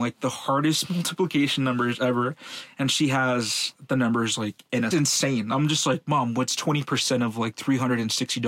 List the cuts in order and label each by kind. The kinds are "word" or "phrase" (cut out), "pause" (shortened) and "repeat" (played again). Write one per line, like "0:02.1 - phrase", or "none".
0:04.9 - phrase